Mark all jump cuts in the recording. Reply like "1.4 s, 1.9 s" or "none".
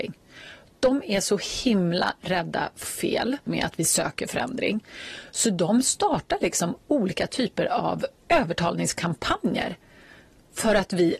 2.8 s, 3.5 s